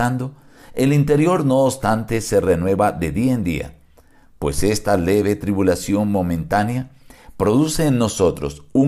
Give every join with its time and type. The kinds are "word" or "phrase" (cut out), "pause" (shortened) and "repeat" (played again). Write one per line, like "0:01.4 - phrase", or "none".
none